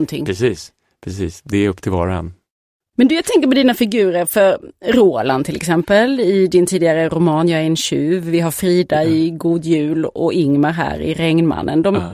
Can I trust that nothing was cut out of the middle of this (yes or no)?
yes